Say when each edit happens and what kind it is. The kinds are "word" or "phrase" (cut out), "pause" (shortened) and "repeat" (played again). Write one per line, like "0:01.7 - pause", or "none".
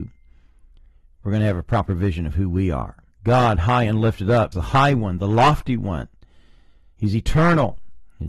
0:03.1 - pause
0:04.5 - word